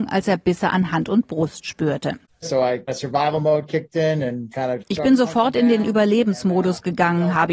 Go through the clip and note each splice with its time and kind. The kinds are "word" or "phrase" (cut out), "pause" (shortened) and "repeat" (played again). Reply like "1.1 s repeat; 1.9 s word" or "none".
2.9 s word; 4.5 s word; 4.8 s word